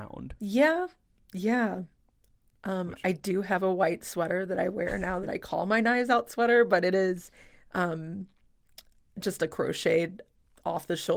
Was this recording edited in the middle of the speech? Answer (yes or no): no